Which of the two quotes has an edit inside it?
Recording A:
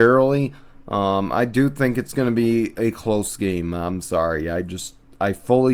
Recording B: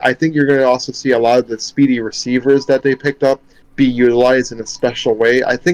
B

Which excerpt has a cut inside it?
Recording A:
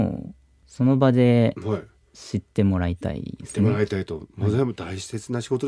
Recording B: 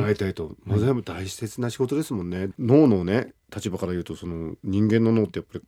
B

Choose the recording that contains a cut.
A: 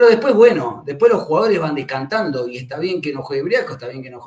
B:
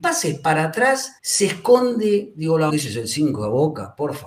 B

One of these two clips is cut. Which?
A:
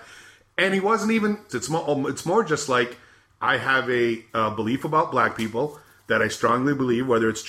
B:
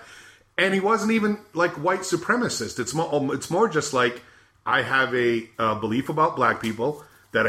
A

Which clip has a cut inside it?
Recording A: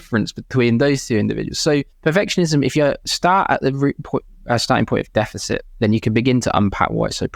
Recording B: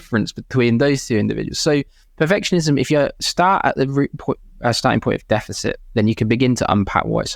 A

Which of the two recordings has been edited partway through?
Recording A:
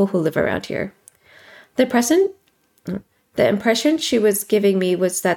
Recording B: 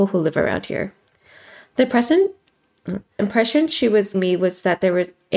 B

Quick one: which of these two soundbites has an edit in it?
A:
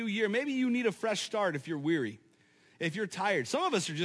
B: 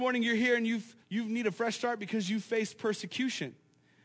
B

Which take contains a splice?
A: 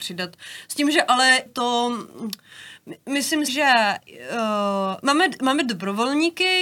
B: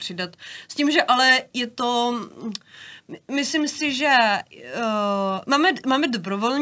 A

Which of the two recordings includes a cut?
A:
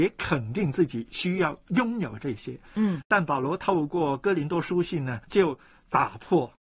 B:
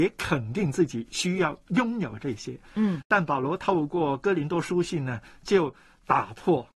A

